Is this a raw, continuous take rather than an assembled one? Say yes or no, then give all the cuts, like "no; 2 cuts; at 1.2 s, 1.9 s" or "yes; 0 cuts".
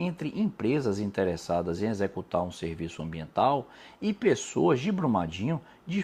yes; 0 cuts